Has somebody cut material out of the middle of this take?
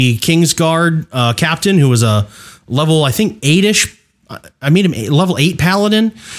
no; 0 cuts

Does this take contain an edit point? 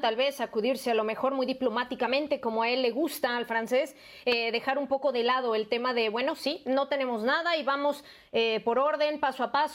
no; 0 cuts

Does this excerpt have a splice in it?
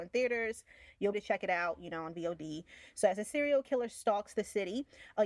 yes; 1 cut; at 1.1 s

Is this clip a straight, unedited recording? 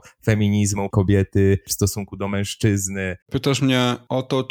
no; 2 cuts; at 0.9 s, 3.2 s

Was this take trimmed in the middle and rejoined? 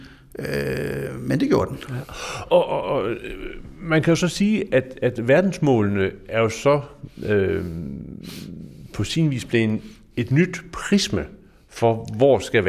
no; 0 cuts

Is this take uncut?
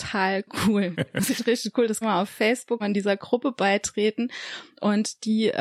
no; 3 cuts; at 1.3 s, 2.0 s, 2.8 s

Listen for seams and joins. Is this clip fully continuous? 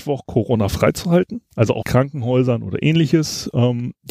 no; 2 cuts; at 1.5 s, 1.8 s

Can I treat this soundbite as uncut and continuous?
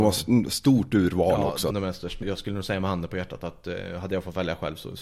no; 2 cuts; at 1.7 s, 2.2 s

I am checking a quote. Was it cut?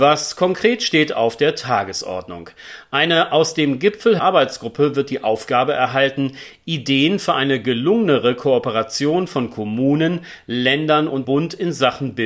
yes; 2 cuts; at 4.2 s, 11.2 s

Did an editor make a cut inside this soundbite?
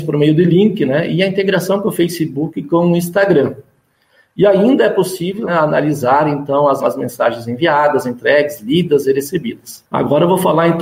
yes; 2 cuts; at 5.5 s, 6.8 s

